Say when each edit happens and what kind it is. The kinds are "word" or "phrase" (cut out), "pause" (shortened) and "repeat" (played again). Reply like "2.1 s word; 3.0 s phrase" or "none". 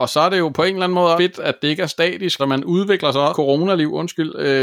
1.2 s word; 2.4 s word; 3.3 s phrase